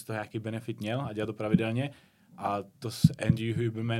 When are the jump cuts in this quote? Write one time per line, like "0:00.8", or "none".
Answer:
none